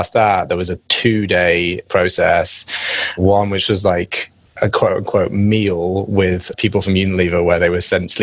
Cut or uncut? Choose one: cut